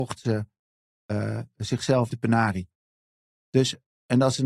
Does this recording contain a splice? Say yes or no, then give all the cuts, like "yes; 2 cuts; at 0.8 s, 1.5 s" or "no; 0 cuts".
yes; 1 cut; at 2.1 s